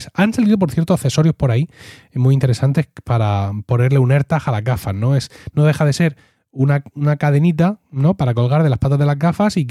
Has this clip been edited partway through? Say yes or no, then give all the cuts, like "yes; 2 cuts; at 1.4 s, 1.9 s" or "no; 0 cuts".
no; 0 cuts